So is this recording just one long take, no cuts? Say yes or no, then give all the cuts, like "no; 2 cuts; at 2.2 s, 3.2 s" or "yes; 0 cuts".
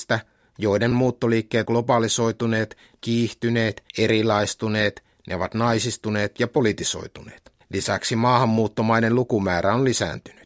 no; 5 cuts; at 0.9 s, 1.7 s, 3.0 s, 3.9 s, 7.6 s